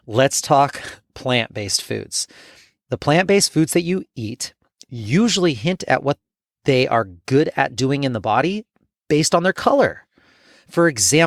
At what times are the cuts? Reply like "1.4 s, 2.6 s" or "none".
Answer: none

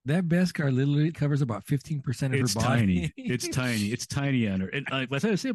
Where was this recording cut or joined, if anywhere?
1.1 s

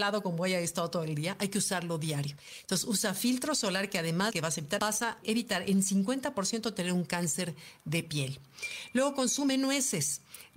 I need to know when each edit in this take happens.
4.3 s, 4.8 s, 5.2 s

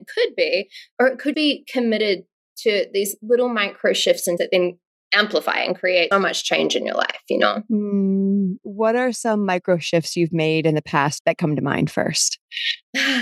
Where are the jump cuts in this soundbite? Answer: 1.3 s, 4.4 s, 6.1 s, 11.2 s

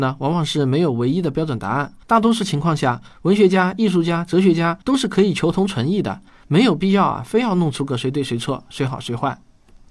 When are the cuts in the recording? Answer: 2.0 s, 4.8 s

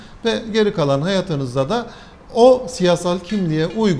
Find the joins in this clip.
none

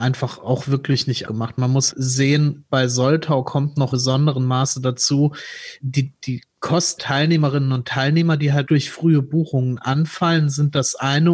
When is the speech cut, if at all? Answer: 1.3 s, 1.9 s, 3.9 s, 5.8 s, 7.0 s, 8.7 s

